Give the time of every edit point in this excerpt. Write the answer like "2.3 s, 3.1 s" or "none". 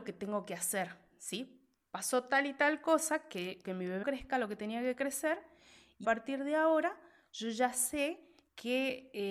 3.6 s, 4.0 s, 6.0 s